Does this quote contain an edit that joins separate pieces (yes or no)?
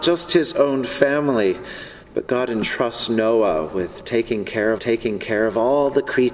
yes